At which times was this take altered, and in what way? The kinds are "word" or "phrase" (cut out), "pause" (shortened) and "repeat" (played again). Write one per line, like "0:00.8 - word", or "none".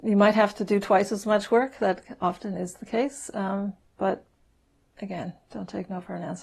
0:03.8 - pause